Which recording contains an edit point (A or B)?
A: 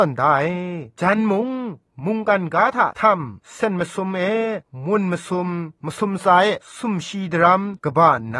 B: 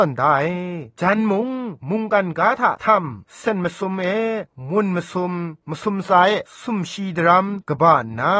B